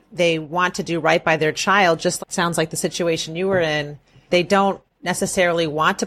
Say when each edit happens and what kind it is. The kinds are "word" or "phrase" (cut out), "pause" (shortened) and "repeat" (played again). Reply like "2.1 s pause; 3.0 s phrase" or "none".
2.2 s word; 4.3 s word